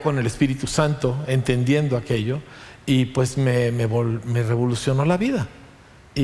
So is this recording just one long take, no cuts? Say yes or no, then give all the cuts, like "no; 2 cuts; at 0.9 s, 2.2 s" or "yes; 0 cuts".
yes; 0 cuts